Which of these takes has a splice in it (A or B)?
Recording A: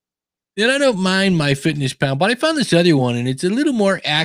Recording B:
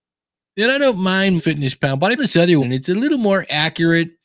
B